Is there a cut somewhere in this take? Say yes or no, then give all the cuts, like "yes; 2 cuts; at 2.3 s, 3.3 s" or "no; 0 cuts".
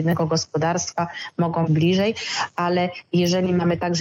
yes; 1 cut; at 1.7 s